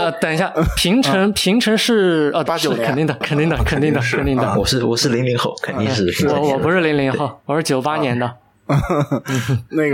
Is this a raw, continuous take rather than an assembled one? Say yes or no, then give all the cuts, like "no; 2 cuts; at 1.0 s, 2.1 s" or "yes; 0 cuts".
no; 2 cuts; at 2.5 s, 3.2 s